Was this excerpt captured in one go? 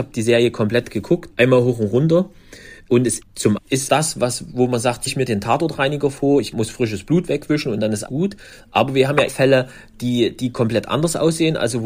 no; 8 cuts; at 1.3 s, 3.2 s, 3.6 s, 3.9 s, 5.1 s, 6.5 s, 8.1 s, 9.3 s

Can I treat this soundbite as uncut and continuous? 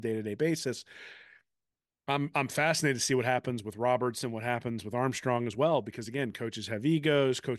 yes; 0 cuts

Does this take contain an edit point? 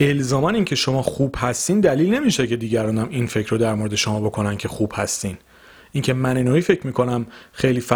no; 0 cuts

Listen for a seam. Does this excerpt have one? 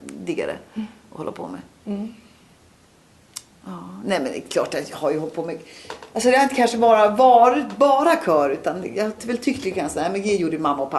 yes; 1 cut; at 3.5 s

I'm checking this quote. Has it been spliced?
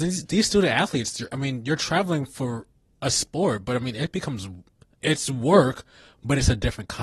no; 0 cuts

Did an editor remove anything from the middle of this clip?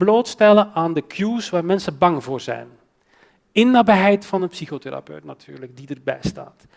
no; 0 cuts

